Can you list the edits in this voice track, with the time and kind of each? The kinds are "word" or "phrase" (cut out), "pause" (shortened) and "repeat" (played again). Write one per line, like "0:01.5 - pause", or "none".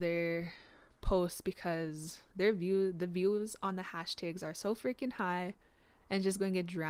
none